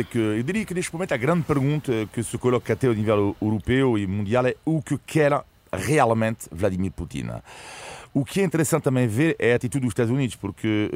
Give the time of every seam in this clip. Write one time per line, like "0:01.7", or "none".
none